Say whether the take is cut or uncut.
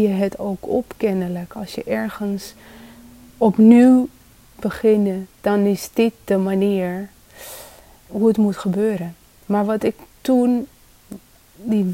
cut